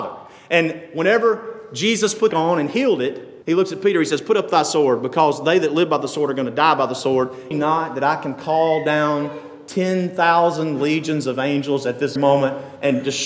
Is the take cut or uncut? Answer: cut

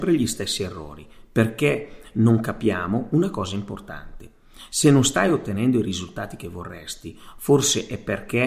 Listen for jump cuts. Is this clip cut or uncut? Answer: uncut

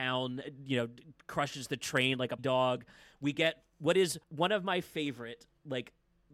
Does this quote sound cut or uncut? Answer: cut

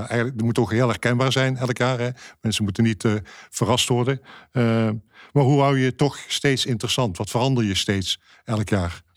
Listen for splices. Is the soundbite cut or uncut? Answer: uncut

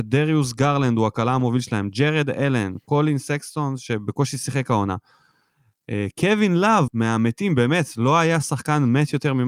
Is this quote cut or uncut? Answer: cut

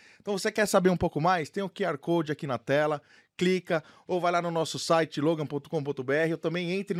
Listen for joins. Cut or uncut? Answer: uncut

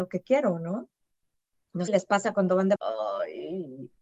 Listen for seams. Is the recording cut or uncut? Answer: cut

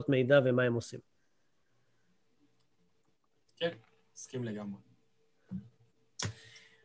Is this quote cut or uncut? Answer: uncut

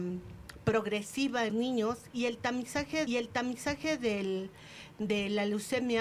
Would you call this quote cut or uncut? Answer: cut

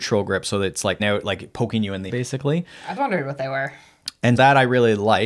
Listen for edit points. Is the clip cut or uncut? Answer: cut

